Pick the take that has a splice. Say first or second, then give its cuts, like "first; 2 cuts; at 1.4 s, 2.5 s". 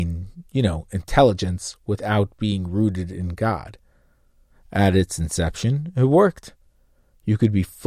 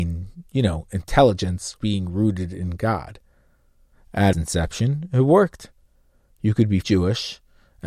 second; 3 cuts; at 1.8 s, 4.3 s, 6.8 s